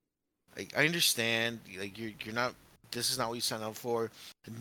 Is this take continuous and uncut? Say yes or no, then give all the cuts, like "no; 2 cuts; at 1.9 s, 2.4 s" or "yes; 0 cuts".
yes; 0 cuts